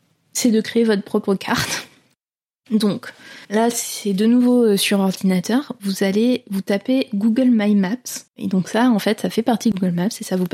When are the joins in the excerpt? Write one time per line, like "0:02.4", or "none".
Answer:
0:03.4
0:08.3